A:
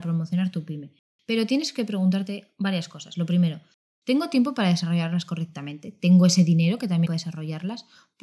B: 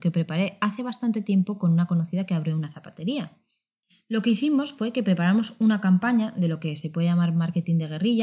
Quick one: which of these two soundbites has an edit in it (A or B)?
A